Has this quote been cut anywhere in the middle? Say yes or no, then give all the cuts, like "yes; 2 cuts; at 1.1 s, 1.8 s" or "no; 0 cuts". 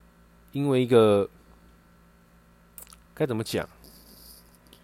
yes; 1 cut; at 3.0 s